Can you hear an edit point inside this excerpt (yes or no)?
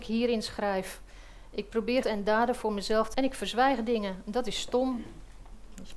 yes